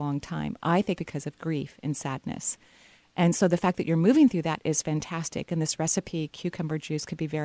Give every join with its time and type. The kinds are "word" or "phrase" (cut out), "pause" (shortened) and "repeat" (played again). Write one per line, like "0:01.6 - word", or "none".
0:01.0 - word